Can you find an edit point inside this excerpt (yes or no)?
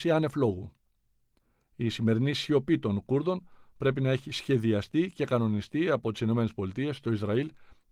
no